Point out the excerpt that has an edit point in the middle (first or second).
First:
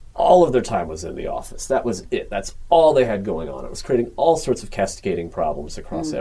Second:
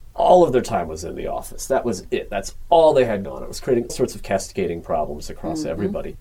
second